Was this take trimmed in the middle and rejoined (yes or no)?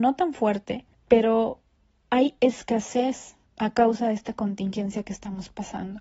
yes